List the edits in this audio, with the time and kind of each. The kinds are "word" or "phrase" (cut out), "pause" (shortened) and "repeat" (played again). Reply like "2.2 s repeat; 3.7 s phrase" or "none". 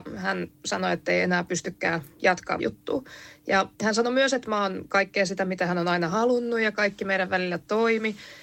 2.6 s word; 3.7 s pause